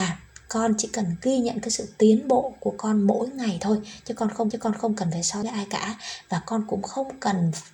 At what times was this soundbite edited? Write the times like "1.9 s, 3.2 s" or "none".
4.5 s, 5.4 s